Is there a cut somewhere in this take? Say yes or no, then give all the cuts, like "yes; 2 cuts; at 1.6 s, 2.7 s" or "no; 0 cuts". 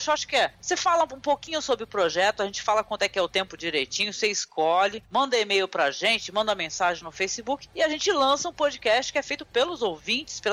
no; 0 cuts